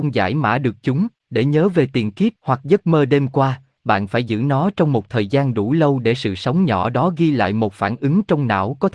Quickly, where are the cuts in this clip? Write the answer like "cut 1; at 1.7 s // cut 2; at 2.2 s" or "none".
cut 1; at 1.2 s // cut 2; at 2.4 s